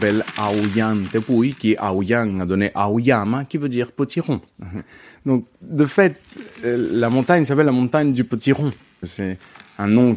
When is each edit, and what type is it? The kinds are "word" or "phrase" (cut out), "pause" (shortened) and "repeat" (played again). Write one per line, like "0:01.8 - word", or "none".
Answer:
none

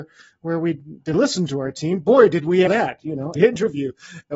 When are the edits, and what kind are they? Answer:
0:01.1 - word
0:02.7 - word
0:03.4 - word

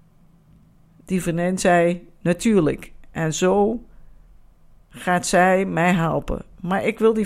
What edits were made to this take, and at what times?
none

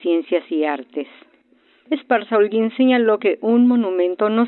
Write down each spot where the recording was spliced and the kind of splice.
none

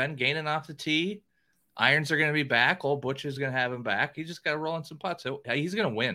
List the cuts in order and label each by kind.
none

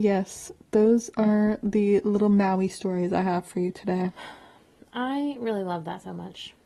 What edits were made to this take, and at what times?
none

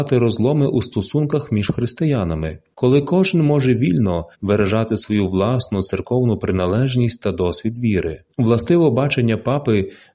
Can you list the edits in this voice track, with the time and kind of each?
0:04.3 - pause
0:08.3 - pause

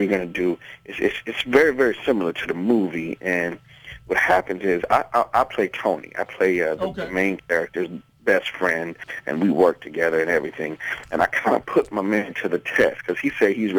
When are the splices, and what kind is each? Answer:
none

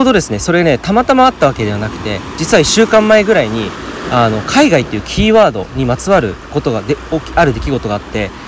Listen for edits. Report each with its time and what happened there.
0:06.5 - phrase

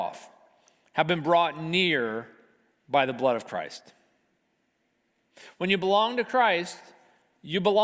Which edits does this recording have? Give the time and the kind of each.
none

